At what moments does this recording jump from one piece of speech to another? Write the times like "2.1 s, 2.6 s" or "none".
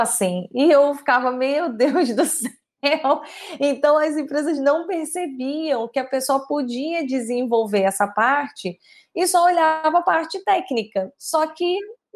none